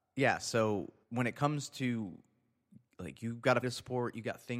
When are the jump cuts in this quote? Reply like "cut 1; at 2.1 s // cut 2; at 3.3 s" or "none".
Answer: cut 1; at 1.0 s // cut 2; at 2.9 s // cut 3; at 3.6 s